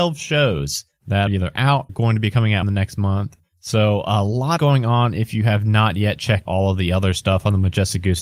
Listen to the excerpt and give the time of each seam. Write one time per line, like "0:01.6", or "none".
0:01.3
0:01.9
0:02.6
0:04.6
0:06.5